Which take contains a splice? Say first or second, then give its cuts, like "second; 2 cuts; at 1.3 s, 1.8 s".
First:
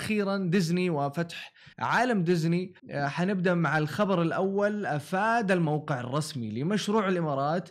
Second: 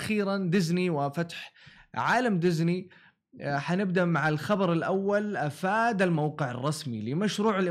first; 2 cuts; at 1.7 s, 2.8 s